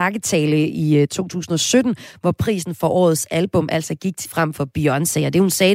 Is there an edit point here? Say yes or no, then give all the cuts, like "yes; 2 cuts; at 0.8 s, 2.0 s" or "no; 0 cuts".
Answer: yes; 1 cut; at 4.3 s